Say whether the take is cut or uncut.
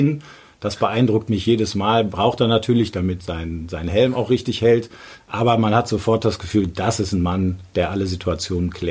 uncut